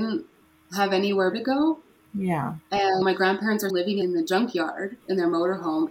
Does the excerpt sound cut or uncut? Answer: cut